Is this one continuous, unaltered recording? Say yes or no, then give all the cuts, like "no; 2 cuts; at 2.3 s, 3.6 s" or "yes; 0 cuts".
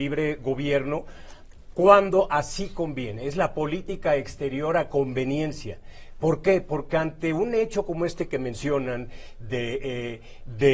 yes; 0 cuts